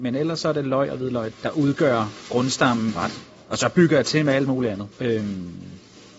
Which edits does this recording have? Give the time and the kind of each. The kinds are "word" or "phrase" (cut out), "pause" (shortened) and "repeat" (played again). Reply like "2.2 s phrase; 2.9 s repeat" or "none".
1.3 s word; 2.9 s phrase; 4.9 s pause